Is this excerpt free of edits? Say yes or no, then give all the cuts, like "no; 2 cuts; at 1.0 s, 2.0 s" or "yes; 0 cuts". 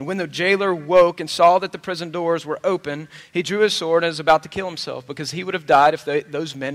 yes; 0 cuts